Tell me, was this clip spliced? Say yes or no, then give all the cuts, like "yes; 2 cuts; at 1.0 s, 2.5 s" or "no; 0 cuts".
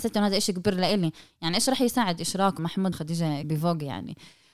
yes; 3 cuts; at 2.6 s, 2.9 s, 3.4 s